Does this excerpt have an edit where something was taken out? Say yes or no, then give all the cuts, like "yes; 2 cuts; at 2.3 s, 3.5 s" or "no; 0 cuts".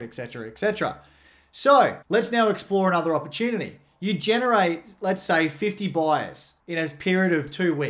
yes; 2 cuts; at 2.0 s, 6.6 s